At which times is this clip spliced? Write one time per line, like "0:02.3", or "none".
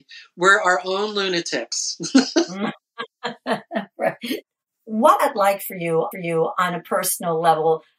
0:05.2
0:06.1